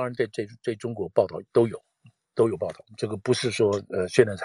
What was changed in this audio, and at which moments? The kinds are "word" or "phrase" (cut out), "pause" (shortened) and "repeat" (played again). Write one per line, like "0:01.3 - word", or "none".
none